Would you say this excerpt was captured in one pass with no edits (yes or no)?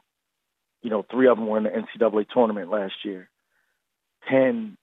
yes